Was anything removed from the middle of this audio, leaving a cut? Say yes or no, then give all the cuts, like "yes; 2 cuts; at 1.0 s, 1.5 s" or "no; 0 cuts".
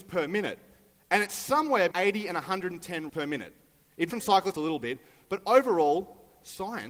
yes; 4 cuts; at 1.9 s, 3.1 s, 4.1 s, 4.5 s